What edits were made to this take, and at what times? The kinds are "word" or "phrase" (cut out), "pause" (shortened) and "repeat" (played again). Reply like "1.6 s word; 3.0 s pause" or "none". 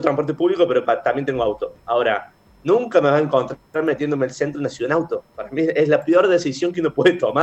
none